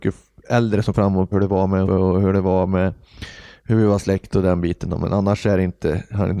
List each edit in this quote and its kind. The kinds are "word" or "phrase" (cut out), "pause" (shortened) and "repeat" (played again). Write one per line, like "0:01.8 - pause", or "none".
0:00.9 - word
0:01.3 - word
0:01.9 - word